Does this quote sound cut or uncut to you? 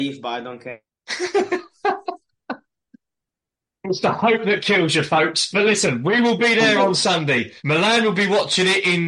cut